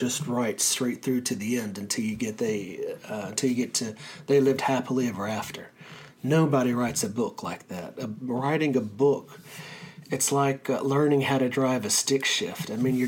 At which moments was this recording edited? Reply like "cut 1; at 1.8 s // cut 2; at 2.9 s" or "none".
none